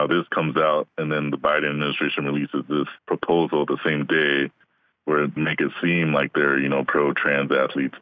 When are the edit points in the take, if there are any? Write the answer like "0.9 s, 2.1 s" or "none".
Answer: 3.0 s, 5.4 s, 6.9 s